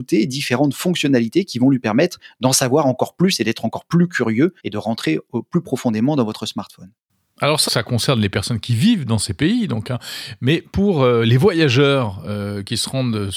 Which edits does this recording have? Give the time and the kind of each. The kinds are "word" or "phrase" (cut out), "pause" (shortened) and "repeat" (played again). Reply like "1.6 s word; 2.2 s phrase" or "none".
4.6 s pause; 7.7 s word